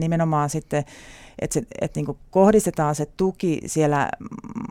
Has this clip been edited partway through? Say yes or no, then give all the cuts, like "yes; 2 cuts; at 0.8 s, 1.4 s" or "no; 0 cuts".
no; 0 cuts